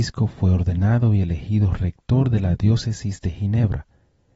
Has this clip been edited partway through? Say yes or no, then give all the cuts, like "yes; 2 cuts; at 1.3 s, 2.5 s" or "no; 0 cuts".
no; 0 cuts